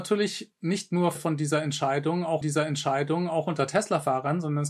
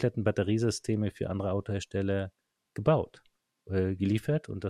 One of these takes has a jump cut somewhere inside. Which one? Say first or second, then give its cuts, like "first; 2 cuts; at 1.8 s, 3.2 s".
first; 2 cuts; at 1.2 s, 2.4 s